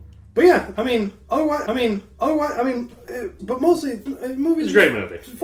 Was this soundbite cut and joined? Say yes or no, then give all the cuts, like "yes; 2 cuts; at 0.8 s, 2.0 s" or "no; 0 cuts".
yes; 3 cuts; at 1.7 s, 3.4 s, 4.1 s